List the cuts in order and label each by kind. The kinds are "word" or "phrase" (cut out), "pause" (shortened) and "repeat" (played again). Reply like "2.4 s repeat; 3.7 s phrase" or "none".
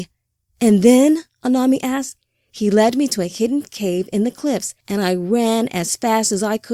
none